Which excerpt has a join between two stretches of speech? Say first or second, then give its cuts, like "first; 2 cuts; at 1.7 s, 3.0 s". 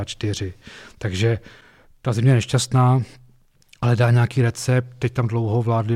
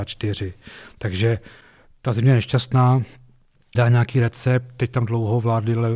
second; 1 cut; at 3.7 s